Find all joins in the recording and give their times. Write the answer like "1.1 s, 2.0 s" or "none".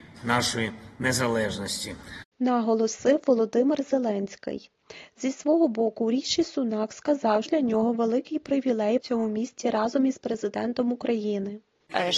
2.3 s, 7.5 s, 9.0 s